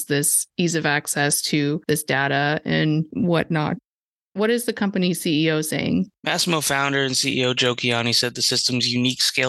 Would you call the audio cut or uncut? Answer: uncut